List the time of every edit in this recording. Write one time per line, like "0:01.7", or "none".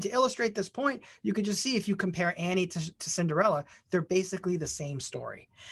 none